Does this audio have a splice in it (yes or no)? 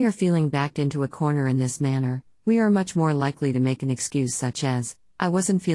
no